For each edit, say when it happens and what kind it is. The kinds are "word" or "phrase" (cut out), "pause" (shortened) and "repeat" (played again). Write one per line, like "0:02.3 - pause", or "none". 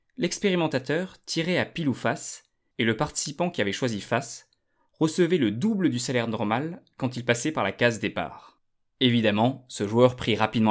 none